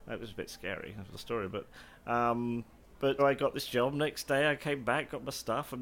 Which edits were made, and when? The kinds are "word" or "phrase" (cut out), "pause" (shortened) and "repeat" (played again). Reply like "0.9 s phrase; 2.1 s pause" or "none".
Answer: 1.1 s word; 3.2 s word